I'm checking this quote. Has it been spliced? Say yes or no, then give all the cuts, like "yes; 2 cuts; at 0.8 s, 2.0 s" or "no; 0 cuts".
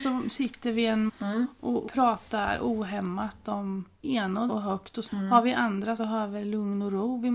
yes; 6 cuts; at 1.1 s, 1.9 s, 4.0 s, 4.5 s, 5.1 s, 6.0 s